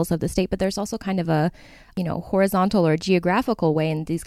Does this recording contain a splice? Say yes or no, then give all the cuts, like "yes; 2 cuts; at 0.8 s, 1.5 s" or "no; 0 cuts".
no; 0 cuts